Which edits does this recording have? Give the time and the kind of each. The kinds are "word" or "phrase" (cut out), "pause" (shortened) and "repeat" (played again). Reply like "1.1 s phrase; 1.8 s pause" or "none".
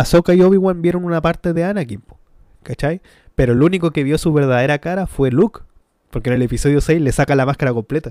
none